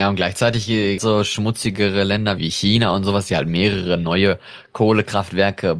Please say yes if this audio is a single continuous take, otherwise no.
no